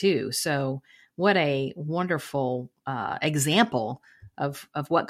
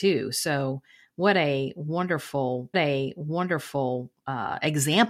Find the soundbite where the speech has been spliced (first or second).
second